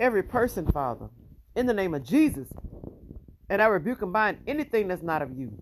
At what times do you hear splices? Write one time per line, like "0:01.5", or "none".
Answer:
none